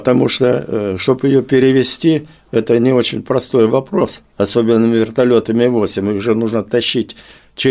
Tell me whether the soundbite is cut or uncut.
uncut